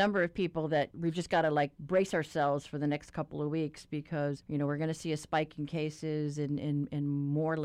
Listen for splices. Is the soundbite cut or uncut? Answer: uncut